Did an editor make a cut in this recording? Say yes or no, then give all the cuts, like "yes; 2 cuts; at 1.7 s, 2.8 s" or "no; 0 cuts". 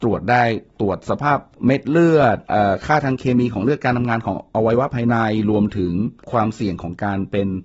yes; 2 cuts; at 2.5 s, 6.2 s